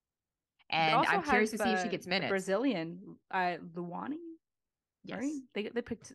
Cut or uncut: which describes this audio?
uncut